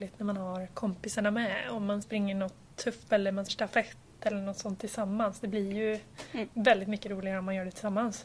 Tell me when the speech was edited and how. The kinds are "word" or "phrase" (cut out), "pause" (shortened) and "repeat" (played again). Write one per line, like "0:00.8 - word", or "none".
0:02.0 - phrase
0:03.1 - word
0:03.5 - word